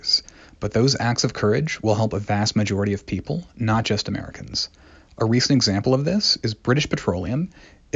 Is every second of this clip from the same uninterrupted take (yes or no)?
yes